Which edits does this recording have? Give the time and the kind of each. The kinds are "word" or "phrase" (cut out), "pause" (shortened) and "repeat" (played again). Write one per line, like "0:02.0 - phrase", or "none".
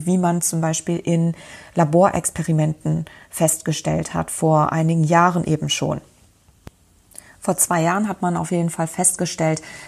none